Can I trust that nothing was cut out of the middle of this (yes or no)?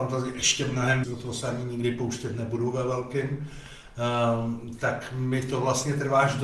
no